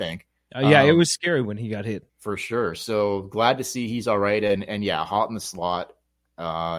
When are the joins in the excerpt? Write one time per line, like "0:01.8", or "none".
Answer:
0:02.1